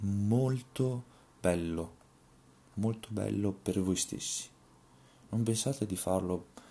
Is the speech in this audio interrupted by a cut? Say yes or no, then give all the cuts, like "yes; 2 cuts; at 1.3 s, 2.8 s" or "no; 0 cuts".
no; 0 cuts